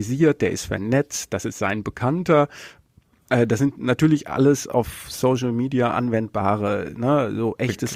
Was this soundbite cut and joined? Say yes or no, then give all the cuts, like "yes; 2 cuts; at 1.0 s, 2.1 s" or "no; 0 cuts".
no; 0 cuts